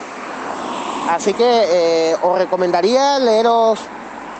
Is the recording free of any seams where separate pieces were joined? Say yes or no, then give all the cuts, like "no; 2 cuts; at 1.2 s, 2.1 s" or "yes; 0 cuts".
yes; 0 cuts